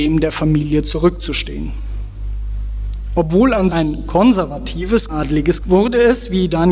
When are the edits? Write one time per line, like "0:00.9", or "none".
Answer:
0:03.7
0:05.1
0:05.6